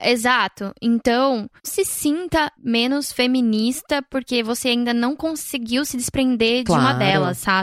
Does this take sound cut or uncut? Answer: cut